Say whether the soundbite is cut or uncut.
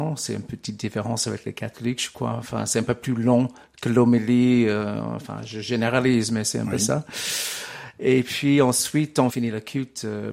uncut